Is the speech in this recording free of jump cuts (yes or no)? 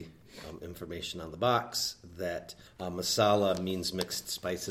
no